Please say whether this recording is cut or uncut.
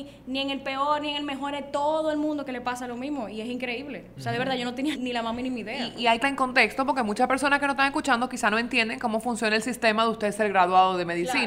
cut